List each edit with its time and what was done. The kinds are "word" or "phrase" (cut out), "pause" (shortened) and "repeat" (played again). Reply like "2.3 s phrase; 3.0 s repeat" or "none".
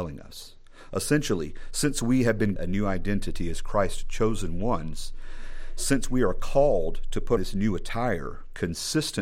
2.6 s word; 7.4 s word